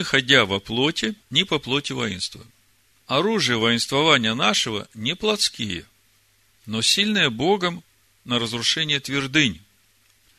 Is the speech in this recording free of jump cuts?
no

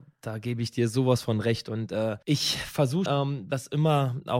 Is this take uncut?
no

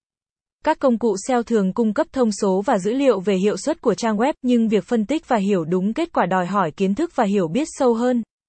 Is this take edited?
no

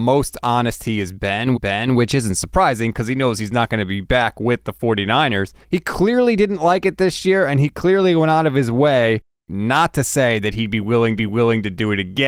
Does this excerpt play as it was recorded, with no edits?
no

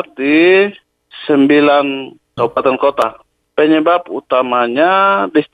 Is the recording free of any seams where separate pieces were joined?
no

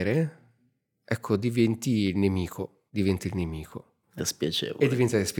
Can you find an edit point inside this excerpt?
yes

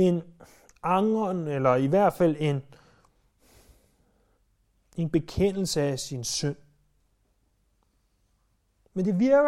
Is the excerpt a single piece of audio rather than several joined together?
yes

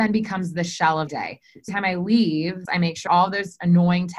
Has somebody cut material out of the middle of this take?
yes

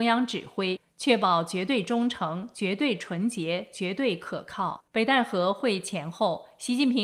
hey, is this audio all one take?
no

